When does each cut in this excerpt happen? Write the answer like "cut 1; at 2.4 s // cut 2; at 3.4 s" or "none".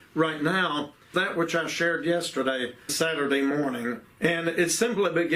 cut 1; at 1.1 s // cut 2; at 2.9 s // cut 3; at 4.1 s